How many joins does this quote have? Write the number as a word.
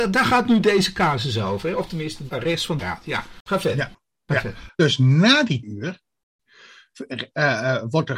three